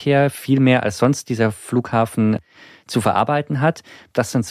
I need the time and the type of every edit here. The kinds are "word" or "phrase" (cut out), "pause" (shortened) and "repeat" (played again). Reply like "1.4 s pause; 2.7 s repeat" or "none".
none